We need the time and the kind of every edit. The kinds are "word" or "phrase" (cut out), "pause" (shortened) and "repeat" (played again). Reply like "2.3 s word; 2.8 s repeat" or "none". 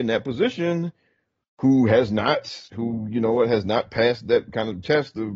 2.7 s pause